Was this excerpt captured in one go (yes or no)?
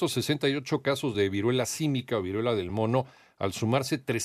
yes